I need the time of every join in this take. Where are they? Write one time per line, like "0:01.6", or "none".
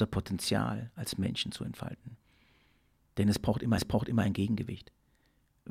0:03.8